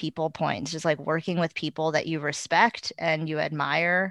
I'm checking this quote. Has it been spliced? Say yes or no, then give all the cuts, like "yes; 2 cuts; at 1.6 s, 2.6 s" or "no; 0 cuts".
no; 0 cuts